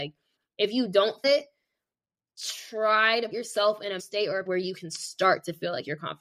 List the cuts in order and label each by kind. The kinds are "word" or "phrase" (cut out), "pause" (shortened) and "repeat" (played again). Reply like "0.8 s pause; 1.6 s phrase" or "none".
1.2 s word; 3.3 s word; 4.0 s word; 4.5 s word